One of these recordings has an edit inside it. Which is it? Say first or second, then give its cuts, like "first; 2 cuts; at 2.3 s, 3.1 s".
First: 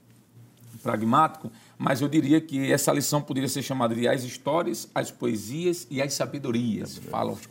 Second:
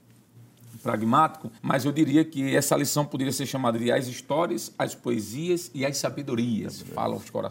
second; 1 cut; at 1.6 s